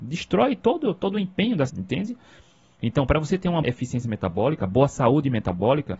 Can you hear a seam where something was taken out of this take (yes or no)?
yes